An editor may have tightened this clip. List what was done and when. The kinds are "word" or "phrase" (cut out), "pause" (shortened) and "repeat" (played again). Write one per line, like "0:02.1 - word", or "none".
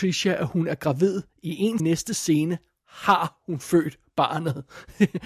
0:01.8 - phrase